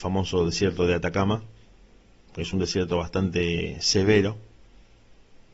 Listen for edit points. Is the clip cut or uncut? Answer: uncut